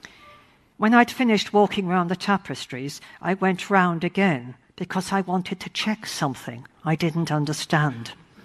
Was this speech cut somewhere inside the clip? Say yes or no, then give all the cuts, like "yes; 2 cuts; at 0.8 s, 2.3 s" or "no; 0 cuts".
yes; 1 cut; at 6.7 s